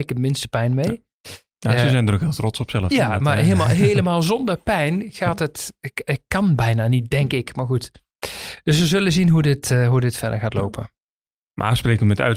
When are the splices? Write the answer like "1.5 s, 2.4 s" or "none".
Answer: none